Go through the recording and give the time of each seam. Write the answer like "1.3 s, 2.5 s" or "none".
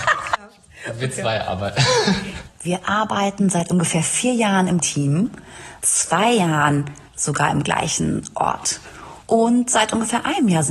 4.8 s, 5.8 s, 7.1 s, 9.2 s